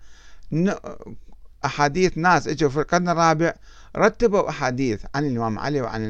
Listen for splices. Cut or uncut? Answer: uncut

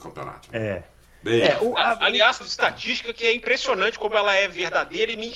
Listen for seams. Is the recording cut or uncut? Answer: cut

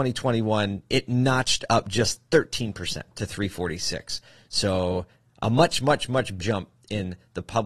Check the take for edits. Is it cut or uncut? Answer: cut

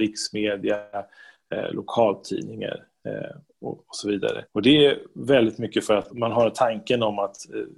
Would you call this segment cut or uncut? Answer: cut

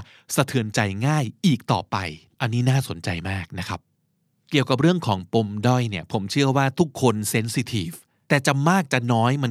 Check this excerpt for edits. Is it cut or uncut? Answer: uncut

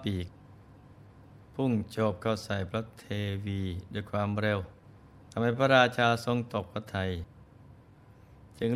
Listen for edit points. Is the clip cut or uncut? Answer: cut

